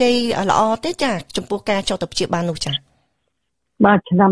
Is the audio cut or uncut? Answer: uncut